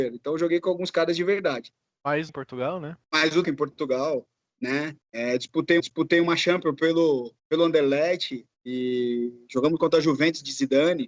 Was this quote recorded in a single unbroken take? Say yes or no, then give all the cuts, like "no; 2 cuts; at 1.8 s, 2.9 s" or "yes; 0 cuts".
no; 7 cuts; at 2.3 s, 3.0 s, 3.4 s, 5.0 s, 5.8 s, 7.4 s, 8.5 s